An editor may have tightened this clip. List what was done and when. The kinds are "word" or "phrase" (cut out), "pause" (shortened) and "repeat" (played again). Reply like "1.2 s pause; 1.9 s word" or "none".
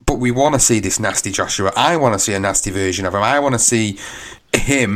none

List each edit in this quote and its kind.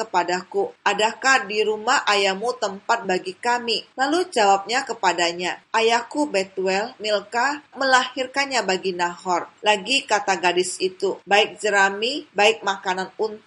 3.0 s word; 7.0 s word; 7.7 s word

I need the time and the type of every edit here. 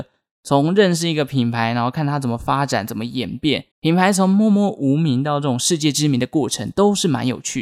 3.7 s pause

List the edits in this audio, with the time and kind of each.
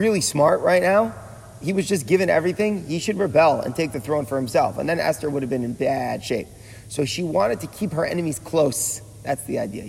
none

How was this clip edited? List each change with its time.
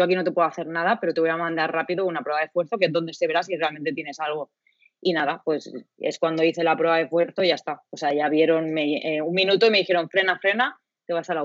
none

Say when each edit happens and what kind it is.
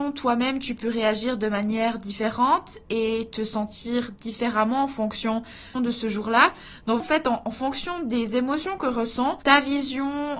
5.8 s phrase; 7.0 s word

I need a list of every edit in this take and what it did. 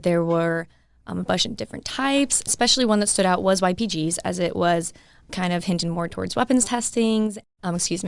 none

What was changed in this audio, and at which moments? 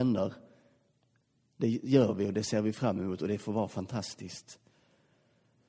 none

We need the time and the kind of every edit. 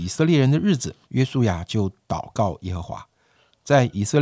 1.0 s pause

